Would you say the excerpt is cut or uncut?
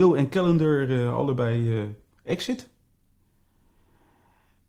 uncut